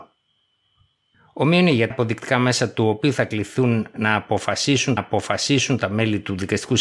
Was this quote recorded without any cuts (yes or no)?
no